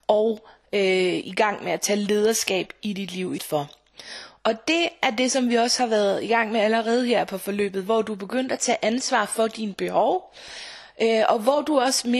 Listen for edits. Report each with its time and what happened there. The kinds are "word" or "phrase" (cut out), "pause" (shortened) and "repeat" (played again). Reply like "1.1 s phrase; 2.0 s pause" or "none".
3.4 s word